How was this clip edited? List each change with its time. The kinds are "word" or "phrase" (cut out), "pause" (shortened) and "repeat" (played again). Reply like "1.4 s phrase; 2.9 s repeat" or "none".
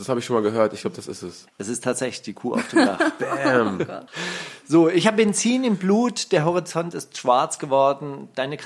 4.1 s pause